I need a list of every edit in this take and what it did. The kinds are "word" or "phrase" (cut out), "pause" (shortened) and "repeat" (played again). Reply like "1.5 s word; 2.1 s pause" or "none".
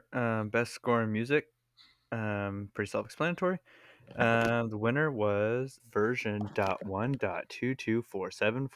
5.8 s phrase